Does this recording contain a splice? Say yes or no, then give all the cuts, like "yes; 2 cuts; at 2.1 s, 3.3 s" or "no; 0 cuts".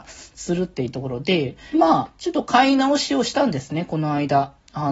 yes; 1 cut; at 1.7 s